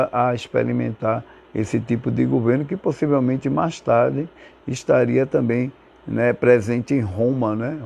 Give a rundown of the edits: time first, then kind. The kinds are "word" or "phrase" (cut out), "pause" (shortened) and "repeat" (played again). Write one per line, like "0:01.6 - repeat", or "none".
none